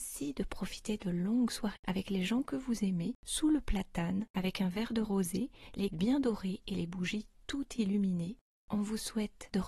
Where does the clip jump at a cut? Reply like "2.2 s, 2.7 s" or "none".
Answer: 1.8 s, 5.9 s